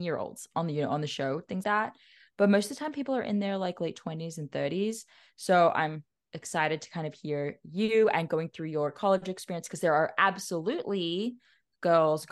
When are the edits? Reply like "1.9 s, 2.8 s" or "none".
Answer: 1.6 s

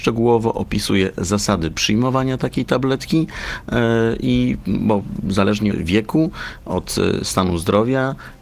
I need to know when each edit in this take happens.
5.7 s

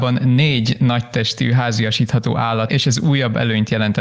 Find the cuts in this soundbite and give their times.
2.7 s

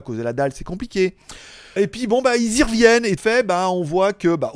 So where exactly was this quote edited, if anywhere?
1.8 s, 3.2 s

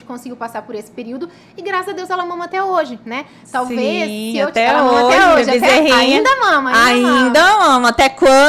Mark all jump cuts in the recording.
none

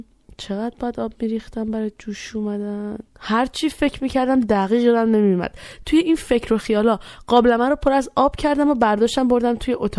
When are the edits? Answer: 3.1 s

